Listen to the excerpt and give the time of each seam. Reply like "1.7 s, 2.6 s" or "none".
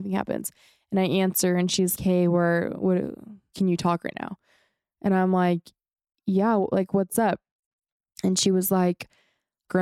2.0 s